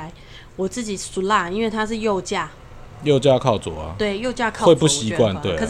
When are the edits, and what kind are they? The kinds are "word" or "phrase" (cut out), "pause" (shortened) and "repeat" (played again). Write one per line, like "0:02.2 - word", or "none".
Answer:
0:02.9 - pause